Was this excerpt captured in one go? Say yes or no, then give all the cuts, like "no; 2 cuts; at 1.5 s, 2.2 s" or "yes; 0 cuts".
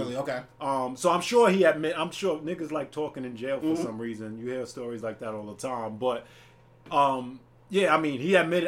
yes; 0 cuts